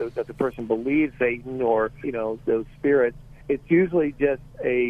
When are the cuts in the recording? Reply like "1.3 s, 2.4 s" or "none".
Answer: 1.1 s, 2.0 s, 2.4 s, 3.4 s

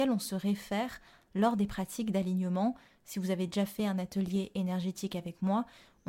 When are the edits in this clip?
none

